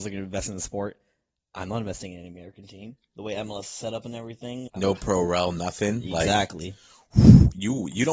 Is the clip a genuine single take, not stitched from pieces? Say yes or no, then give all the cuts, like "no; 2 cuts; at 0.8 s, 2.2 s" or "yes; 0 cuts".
no; 1 cut; at 4.7 s